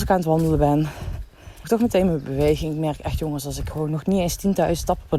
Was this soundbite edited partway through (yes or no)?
yes